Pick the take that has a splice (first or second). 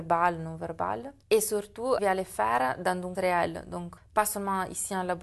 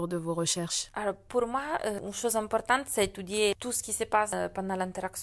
first